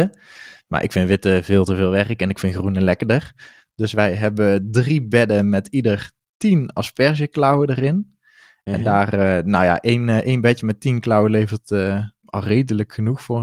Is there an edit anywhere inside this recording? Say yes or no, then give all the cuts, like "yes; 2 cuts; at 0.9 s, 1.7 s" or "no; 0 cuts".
no; 0 cuts